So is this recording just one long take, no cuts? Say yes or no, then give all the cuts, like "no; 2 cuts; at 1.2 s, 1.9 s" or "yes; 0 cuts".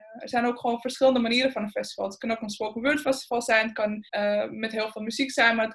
no; 1 cut; at 4.1 s